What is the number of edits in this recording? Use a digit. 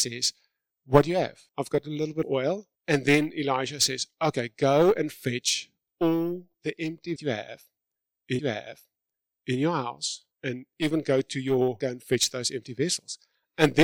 8